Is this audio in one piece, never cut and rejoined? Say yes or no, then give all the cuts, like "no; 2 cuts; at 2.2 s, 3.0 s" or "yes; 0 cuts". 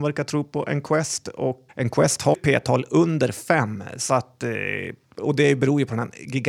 no; 2 cuts; at 1.7 s, 2.3 s